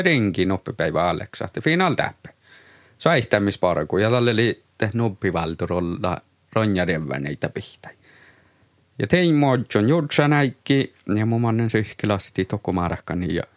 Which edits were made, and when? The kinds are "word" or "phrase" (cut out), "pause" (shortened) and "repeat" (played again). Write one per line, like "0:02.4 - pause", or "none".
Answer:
none